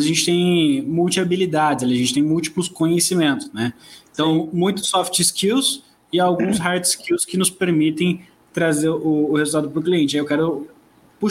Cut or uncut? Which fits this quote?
uncut